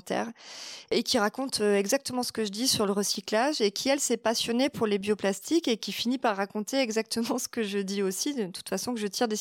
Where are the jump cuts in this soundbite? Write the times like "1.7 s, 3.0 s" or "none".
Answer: none